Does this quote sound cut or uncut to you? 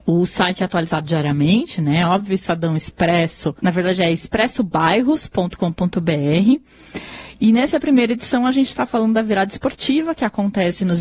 cut